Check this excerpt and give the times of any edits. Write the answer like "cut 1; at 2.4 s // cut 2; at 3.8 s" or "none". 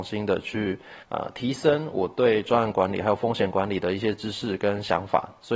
cut 1; at 1.0 s